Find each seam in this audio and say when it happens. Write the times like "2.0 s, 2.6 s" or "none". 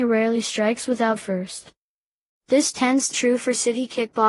1.2 s, 3.1 s

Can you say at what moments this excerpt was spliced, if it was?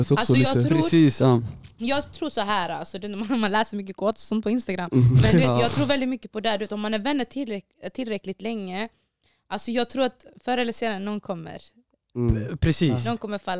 none

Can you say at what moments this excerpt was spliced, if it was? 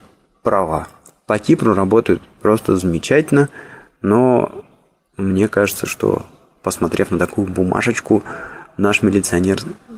none

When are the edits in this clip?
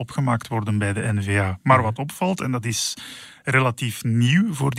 none

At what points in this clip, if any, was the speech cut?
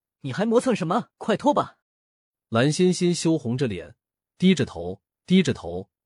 1.1 s, 1.8 s, 5.1 s

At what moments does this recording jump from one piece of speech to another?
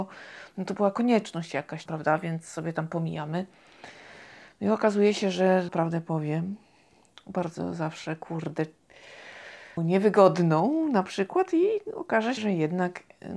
1.9 s, 5.7 s, 9.8 s, 12.4 s

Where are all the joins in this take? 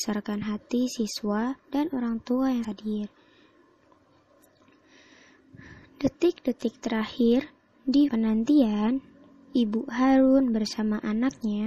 1.6 s, 2.6 s, 8.1 s

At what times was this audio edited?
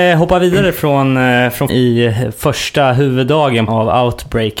1.7 s, 3.7 s

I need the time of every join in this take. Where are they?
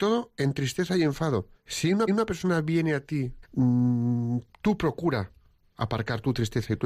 1.6 s, 2.1 s, 3.4 s

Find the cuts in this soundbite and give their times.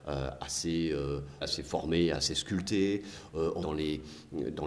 1.4 s, 2.1 s, 3.6 s

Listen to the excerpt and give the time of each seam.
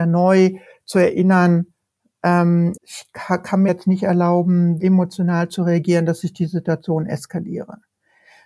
2.8 s, 3.7 s, 4.8 s

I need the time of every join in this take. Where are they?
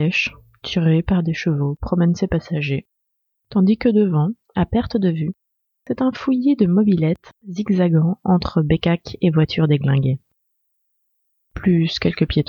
none

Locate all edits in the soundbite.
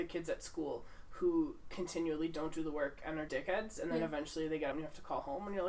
3.3 s, 4.7 s

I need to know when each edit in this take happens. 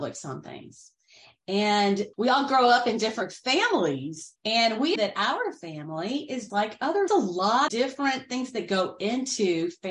2.1 s, 4.4 s, 5.0 s, 6.5 s, 7.1 s, 7.7 s

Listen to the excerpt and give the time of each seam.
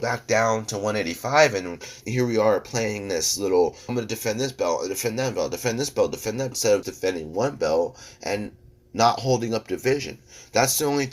2.0 s, 3.9 s, 6.5 s, 6.8 s

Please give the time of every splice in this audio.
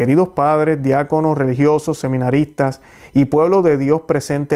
none

